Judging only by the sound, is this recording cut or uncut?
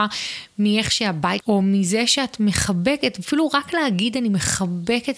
cut